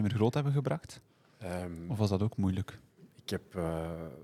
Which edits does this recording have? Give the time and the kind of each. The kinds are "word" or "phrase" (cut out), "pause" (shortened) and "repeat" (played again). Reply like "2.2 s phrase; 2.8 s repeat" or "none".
none